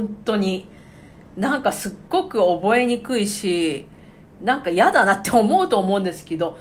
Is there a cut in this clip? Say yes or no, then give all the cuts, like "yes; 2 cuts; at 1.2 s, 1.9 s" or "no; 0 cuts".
no; 0 cuts